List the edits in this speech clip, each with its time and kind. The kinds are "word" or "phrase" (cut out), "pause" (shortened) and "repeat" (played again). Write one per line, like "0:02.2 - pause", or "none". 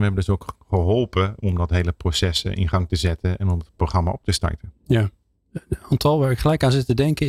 none